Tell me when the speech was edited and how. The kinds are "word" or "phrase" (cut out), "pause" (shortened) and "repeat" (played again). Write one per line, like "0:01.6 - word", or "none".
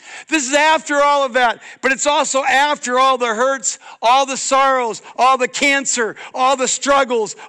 none